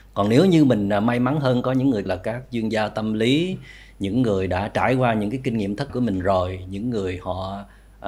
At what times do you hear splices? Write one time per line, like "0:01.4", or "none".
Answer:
0:02.1
0:05.9